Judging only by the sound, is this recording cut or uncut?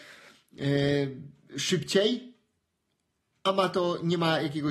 uncut